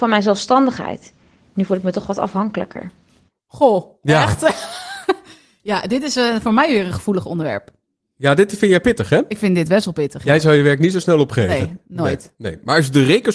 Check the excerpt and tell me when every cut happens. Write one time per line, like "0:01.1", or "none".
none

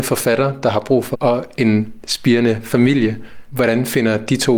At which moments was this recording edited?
0:01.1

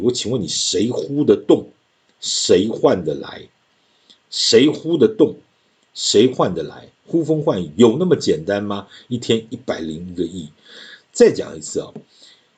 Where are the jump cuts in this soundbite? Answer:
none

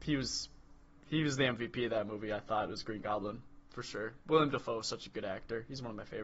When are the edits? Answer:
none

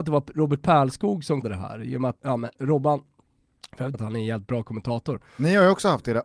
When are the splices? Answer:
0:01.4
0:02.2
0:03.9

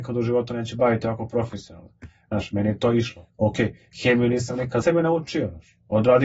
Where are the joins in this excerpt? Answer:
0:03.3
0:04.8

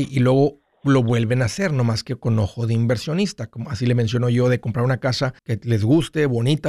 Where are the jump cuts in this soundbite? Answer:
0:05.4

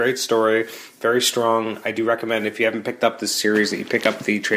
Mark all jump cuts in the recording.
none

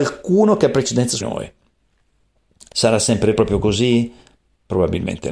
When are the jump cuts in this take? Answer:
0:01.2
0:02.7
0:03.3

